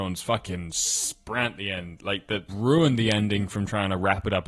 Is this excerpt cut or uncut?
cut